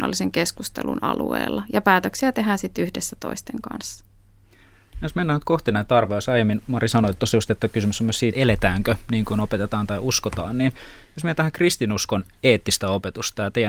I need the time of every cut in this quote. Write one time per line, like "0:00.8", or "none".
0:08.3